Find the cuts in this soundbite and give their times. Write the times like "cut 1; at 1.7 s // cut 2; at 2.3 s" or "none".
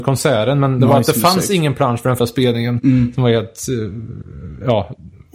cut 1; at 2.2 s